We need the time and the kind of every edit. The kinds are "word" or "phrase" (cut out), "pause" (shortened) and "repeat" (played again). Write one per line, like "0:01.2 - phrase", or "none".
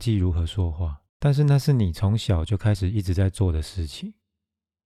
0:01.1 - pause